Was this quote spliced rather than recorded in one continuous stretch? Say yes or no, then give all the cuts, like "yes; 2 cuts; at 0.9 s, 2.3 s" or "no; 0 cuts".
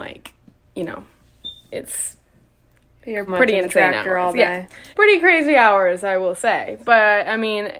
yes; 2 cuts; at 3.3 s, 4.9 s